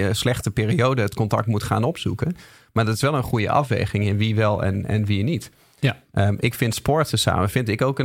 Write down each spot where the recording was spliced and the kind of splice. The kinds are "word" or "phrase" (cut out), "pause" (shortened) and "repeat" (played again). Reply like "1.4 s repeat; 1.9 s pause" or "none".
none